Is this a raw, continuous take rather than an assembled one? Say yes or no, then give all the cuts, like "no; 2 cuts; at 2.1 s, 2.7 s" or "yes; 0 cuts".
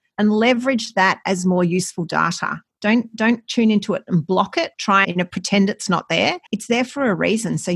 no; 3 cuts; at 4.7 s, 5.0 s, 6.5 s